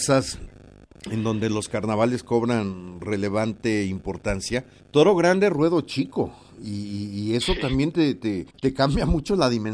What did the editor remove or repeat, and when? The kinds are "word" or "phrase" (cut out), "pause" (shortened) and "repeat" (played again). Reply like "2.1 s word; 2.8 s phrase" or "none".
4.8 s pause; 8.5 s pause